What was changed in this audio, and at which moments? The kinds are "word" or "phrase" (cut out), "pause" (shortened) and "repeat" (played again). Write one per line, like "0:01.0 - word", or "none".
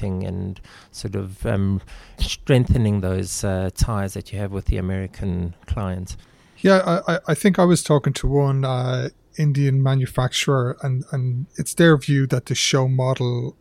0:11.5 - pause

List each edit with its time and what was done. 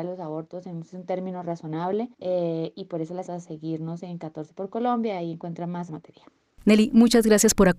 0:02.1 - pause
0:03.3 - word
0:05.9 - phrase

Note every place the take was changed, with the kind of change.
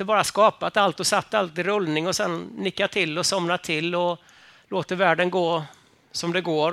none

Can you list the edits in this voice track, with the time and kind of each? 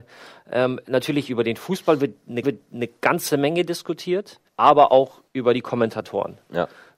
0:02.4 - repeat
0:04.5 - pause
0:05.3 - pause

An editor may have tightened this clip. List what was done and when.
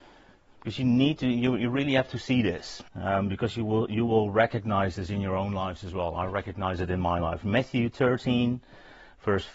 0:02.9 - pause

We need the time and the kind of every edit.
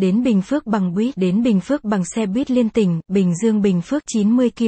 none

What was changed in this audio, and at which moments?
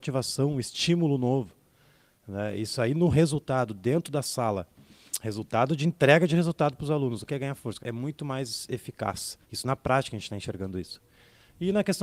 0:07.3 - word
0:07.8 - phrase
0:09.4 - pause

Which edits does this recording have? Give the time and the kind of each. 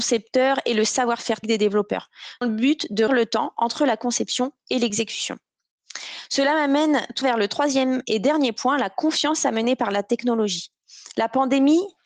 0:01.4 - word
0:02.4 - word
0:03.1 - word
0:07.2 - word

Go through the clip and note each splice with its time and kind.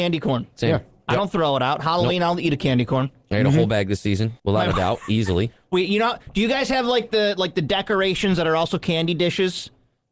0:04.4 - pause

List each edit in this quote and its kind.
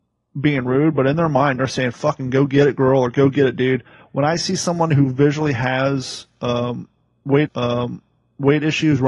0:07.5 - repeat

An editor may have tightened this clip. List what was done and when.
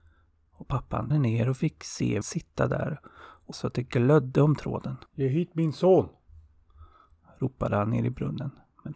0:01.1 - word
0:02.2 - word
0:03.5 - word
0:05.1 - pause

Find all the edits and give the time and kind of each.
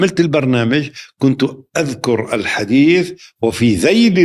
none

